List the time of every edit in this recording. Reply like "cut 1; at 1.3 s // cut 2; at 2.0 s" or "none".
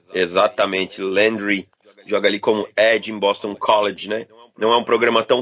none